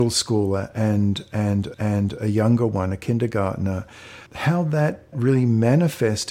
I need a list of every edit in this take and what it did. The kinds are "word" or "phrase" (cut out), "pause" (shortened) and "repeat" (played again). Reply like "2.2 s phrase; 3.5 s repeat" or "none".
1.7 s repeat; 4.3 s pause; 5.1 s word